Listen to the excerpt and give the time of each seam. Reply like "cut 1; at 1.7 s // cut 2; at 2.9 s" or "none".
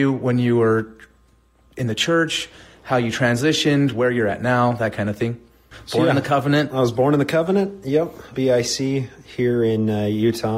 cut 1; at 8.3 s